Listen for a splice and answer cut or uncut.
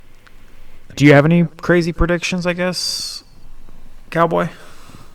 cut